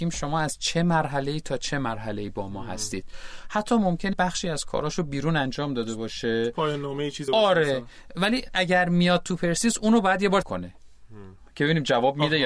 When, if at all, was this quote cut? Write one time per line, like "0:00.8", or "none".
0:04.1
0:07.3
0:10.4